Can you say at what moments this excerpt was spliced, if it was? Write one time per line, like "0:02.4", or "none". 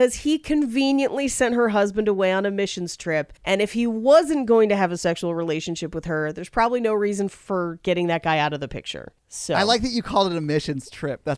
0:03.4
0:09.2

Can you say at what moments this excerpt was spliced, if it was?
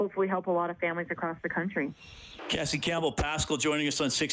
none

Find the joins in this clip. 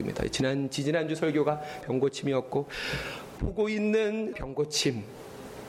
0:01.8
0:03.4
0:04.3

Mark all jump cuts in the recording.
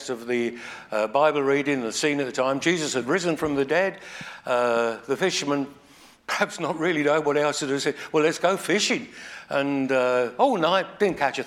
none

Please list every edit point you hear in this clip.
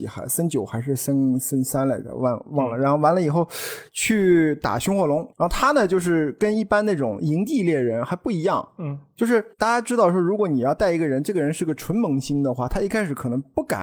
0:05.3
0:09.5

